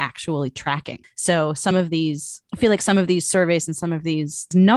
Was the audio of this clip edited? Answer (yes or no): no